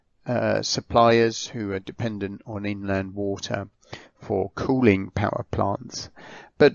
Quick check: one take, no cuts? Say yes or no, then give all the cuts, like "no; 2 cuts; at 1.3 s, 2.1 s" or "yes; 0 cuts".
yes; 0 cuts